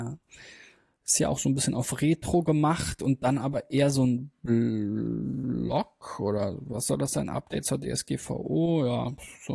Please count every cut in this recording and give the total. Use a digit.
0